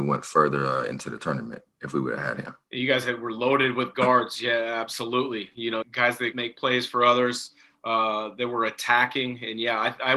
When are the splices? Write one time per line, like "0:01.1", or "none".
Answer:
0:01.7
0:02.6
0:05.8
0:06.3